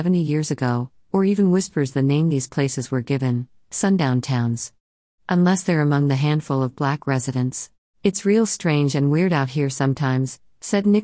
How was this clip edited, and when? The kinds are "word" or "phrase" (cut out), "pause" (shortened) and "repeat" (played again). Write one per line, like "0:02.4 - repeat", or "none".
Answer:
0:07.8 - pause